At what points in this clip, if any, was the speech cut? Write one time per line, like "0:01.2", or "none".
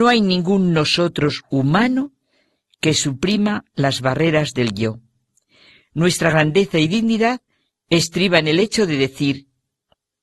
none